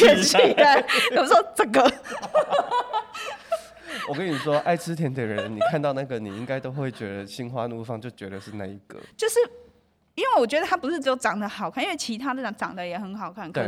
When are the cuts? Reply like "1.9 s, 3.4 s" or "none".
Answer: none